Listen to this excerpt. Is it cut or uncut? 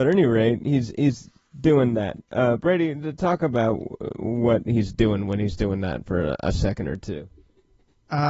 uncut